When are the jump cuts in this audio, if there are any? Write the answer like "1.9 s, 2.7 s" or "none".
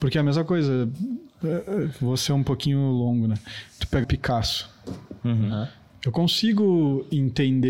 4.0 s, 5.9 s

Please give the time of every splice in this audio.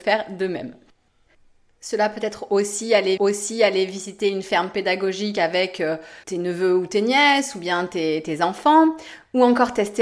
3.2 s, 6.2 s

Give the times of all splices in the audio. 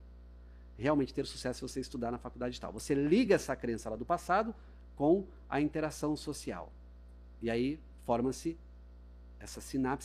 none

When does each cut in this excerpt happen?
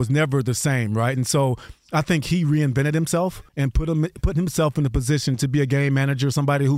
3.5 s

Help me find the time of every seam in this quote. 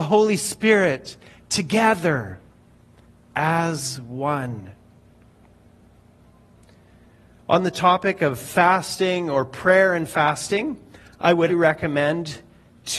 11.5 s

